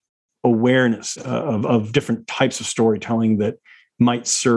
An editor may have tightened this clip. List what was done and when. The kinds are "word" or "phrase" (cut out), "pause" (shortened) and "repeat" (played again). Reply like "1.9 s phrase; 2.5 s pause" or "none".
1.2 s word